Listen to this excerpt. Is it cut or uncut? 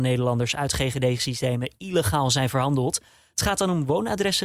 uncut